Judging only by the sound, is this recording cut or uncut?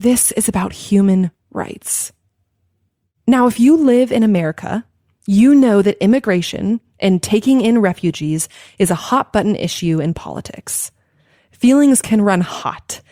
uncut